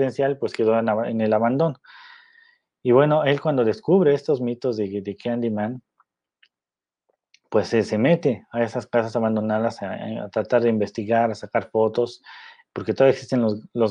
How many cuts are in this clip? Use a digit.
0